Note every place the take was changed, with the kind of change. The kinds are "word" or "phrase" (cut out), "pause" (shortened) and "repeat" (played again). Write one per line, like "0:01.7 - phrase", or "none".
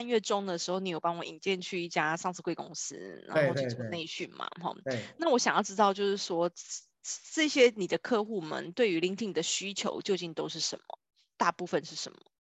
none